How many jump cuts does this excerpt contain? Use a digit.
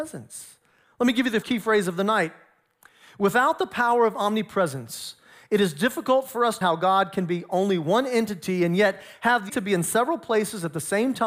3